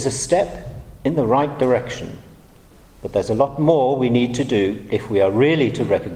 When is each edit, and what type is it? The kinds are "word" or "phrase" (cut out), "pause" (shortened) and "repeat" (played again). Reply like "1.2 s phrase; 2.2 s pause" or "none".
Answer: none